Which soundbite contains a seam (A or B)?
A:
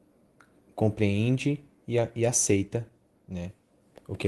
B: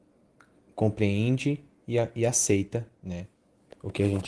B